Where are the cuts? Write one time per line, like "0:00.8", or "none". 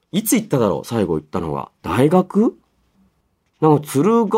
0:01.7
0:03.2